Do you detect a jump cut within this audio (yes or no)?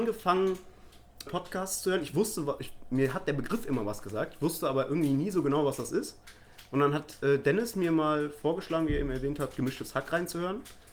yes